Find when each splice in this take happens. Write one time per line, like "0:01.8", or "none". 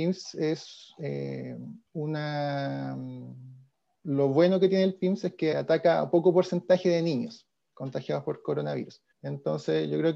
0:01.9
0:05.5
0:09.1